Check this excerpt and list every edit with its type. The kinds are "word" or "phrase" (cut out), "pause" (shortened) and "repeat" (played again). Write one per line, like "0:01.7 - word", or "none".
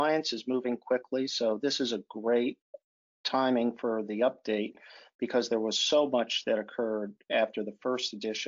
none